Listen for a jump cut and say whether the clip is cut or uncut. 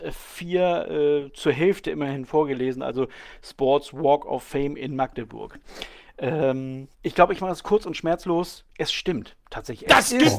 cut